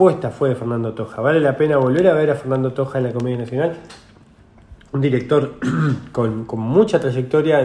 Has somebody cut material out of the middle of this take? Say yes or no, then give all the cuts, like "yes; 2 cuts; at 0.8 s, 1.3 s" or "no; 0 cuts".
no; 0 cuts